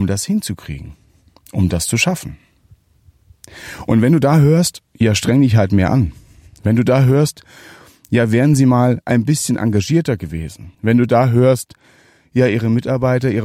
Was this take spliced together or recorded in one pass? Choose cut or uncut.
cut